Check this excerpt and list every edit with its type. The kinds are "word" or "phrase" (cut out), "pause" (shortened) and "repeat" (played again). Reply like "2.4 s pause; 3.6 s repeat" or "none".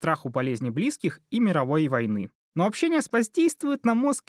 3.1 s word